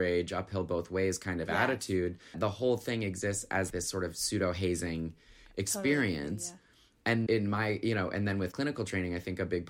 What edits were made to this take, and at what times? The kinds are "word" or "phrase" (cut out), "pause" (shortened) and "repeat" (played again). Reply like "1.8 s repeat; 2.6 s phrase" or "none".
2.3 s word; 3.7 s word; 7.3 s word; 8.5 s word